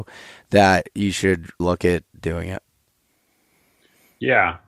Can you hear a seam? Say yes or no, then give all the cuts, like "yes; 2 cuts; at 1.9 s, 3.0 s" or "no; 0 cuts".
yes; 1 cut; at 1.6 s